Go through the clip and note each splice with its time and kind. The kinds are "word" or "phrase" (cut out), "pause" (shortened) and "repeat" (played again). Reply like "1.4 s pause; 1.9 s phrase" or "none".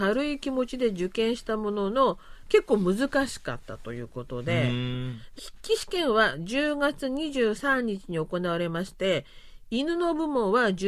5.4 s word